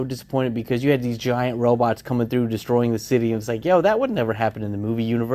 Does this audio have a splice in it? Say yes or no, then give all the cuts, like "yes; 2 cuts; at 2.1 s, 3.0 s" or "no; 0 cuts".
no; 0 cuts